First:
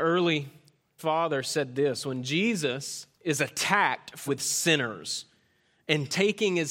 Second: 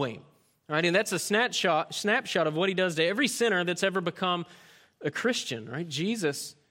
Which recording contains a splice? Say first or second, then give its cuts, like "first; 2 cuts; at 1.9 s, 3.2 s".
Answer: first; 3 cuts; at 1.0 s, 3.1 s, 4.3 s